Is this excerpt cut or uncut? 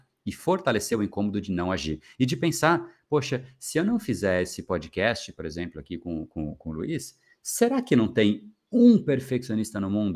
uncut